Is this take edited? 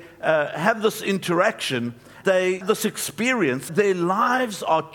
yes; 3 cuts; at 2.2 s, 2.6 s, 3.7 s

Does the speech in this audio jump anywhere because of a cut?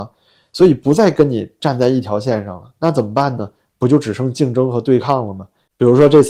no; 0 cuts

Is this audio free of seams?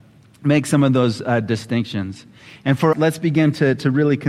no; 1 cut; at 2.9 s

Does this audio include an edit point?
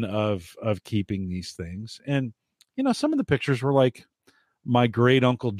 no; 0 cuts

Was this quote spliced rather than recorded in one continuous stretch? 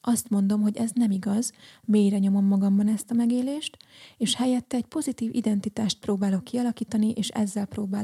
no; 0 cuts

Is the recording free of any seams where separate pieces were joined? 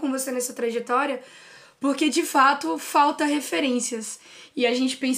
yes; 0 cuts

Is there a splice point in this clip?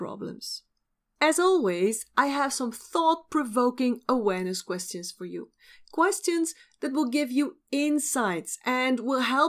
no; 0 cuts

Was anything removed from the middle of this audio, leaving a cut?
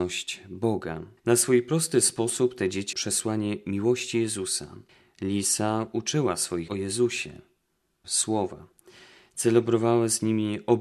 yes; 5 cuts; at 1.2 s, 2.9 s, 4.9 s, 6.7 s, 8.0 s

